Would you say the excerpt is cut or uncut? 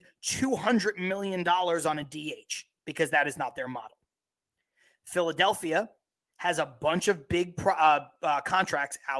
uncut